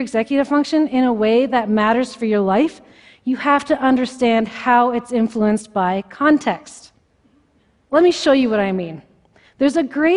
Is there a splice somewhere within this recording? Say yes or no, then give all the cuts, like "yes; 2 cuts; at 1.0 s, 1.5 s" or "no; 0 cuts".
no; 0 cuts